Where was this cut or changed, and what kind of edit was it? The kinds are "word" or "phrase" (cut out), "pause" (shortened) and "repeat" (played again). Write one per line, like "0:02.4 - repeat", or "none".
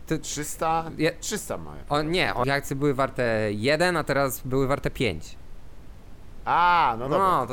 0:02.4 - word